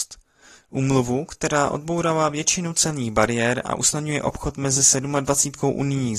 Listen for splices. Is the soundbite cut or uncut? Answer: uncut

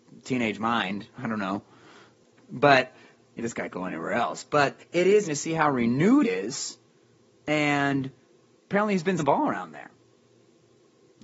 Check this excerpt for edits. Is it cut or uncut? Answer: cut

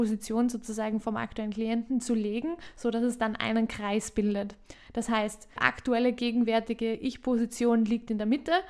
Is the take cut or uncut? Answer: cut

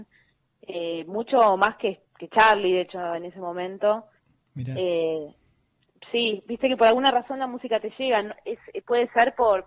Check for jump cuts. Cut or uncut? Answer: uncut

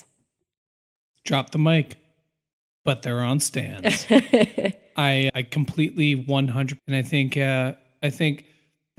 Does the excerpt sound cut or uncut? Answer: cut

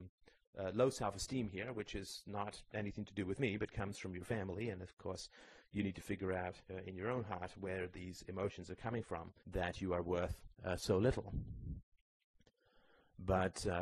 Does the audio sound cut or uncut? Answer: cut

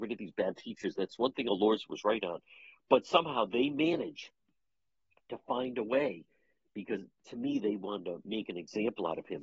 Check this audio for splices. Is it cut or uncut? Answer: uncut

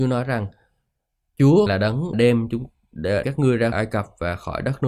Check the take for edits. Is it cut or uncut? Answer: cut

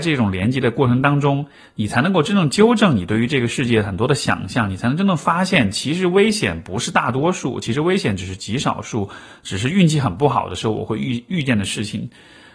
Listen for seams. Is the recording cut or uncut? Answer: uncut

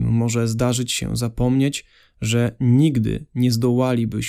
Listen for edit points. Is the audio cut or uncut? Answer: uncut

